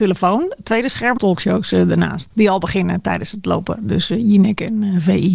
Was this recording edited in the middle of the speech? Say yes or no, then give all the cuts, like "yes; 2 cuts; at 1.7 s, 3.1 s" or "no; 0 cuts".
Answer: yes; 1 cut; at 1.2 s